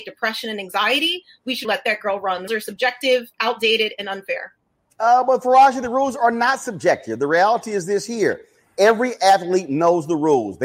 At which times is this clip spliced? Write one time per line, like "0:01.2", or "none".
0:01.6
0:02.5